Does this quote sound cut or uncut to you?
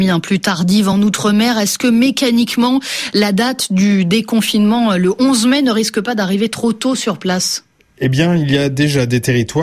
uncut